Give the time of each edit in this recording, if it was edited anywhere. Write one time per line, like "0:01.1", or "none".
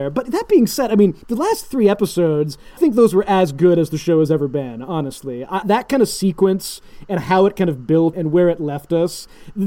0:01.2
0:02.8
0:05.6
0:08.1